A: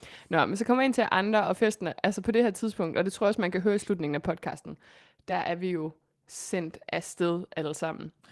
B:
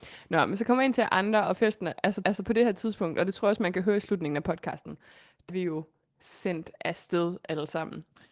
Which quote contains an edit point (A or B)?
B